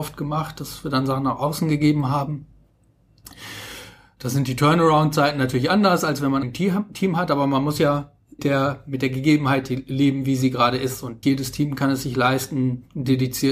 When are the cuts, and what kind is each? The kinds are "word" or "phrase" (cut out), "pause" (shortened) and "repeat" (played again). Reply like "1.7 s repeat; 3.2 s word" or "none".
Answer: 6.4 s word; 8.4 s word; 11.2 s word